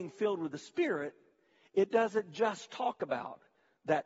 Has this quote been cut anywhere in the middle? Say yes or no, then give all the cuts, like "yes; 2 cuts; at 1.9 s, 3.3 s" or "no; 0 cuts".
no; 0 cuts